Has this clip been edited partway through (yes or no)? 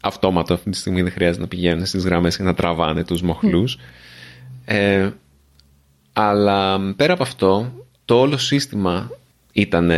no